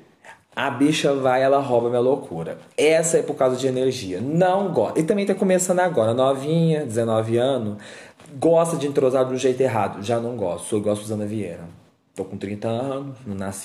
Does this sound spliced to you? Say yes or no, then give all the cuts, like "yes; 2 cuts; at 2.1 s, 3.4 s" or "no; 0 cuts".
no; 0 cuts